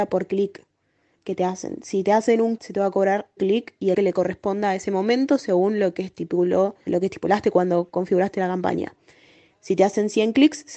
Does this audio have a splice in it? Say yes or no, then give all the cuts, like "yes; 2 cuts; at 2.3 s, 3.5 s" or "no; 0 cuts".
yes; 4 cuts; at 2.6 s, 3.4 s, 3.9 s, 6.9 s